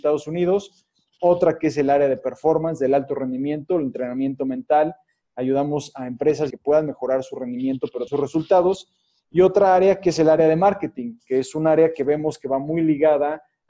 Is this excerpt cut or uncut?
cut